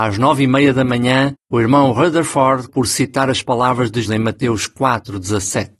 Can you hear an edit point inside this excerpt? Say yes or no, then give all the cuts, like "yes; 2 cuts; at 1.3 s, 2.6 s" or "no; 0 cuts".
yes; 3 cuts; at 1.4 s, 2.7 s, 4.0 s